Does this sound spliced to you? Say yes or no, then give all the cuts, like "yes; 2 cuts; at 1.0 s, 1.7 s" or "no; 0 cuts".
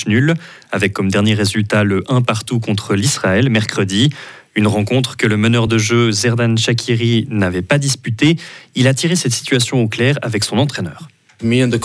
no; 0 cuts